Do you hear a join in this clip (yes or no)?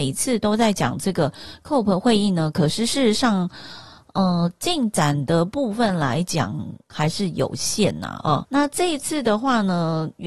yes